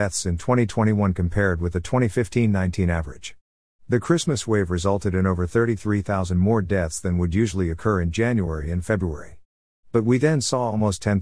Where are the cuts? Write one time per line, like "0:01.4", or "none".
none